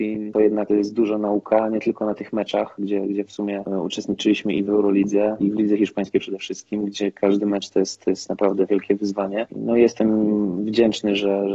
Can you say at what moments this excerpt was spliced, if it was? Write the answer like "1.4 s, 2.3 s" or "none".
4.7 s, 5.4 s